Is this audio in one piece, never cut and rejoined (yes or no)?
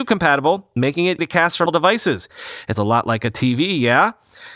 no